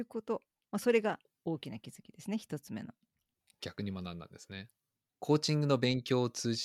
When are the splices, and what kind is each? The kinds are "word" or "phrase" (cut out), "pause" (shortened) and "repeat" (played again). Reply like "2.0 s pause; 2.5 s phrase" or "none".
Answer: none